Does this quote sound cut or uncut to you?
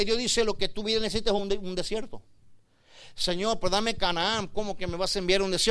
uncut